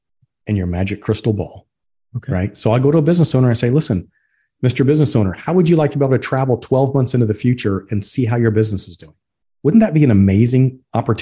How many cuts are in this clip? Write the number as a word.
zero